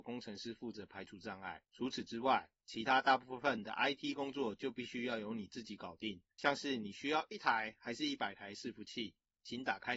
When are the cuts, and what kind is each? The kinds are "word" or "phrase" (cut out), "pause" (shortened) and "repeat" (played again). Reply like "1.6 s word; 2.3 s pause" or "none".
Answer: 1.6 s pause; 6.3 s pause